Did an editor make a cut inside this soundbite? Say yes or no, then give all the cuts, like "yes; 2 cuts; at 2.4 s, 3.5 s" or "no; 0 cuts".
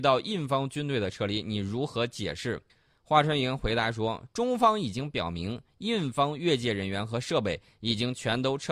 yes; 1 cut; at 2.7 s